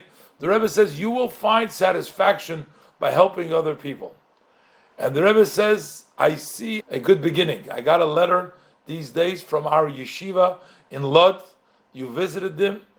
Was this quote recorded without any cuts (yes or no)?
no